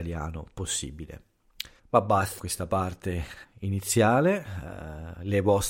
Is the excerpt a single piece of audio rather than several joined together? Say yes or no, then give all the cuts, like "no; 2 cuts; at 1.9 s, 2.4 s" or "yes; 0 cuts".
no; 3 cuts; at 1.8 s, 2.4 s, 3.4 s